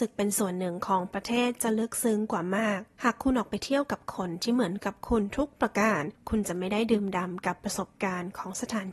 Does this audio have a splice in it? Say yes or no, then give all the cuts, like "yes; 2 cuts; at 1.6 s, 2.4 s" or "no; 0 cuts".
yes; 1 cut; at 2.9 s